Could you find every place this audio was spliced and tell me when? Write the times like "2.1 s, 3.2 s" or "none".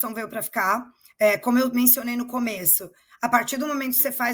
none